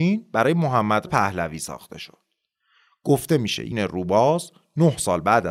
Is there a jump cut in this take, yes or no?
yes